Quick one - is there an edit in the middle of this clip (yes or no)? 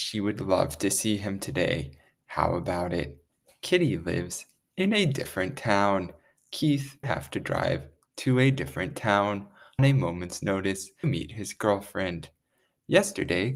yes